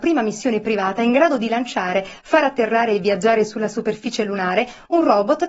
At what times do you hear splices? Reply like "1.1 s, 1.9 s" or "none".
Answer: none